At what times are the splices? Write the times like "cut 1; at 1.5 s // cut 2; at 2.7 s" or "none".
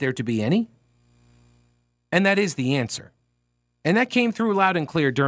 none

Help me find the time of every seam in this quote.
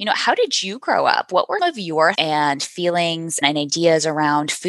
cut 1; at 1.6 s // cut 2; at 2.1 s // cut 3; at 3.4 s

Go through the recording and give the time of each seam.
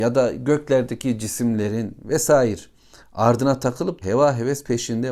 cut 1; at 4.0 s

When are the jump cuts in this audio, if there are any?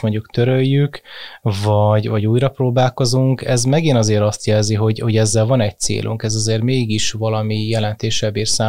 none

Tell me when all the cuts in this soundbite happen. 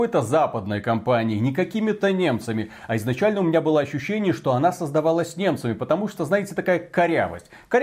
none

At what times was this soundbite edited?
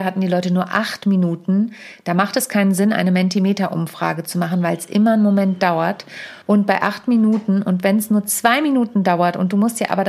cut 1; at 6.4 s

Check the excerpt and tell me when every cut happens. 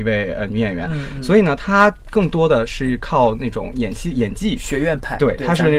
none

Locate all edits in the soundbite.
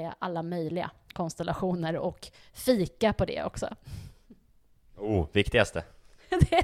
none

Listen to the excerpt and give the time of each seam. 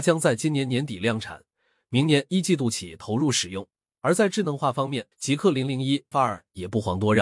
cut 1; at 5.1 s // cut 2; at 6.1 s

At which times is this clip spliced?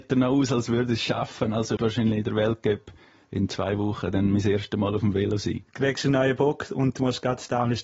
cut 1; at 1.8 s

